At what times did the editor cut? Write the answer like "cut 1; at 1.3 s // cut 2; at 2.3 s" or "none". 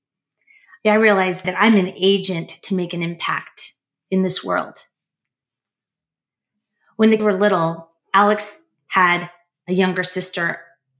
cut 1; at 1.4 s // cut 2; at 7.2 s